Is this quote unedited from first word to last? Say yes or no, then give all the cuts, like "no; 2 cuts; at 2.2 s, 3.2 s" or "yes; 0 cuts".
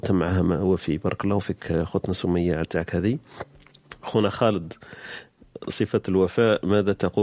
no; 1 cut; at 2.6 s